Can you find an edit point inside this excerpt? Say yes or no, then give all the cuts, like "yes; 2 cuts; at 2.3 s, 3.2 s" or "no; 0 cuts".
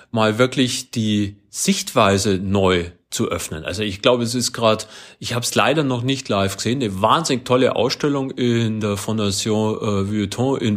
no; 0 cuts